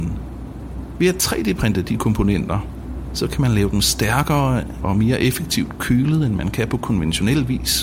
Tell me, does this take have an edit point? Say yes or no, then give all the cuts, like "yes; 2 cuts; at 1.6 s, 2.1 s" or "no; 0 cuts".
no; 0 cuts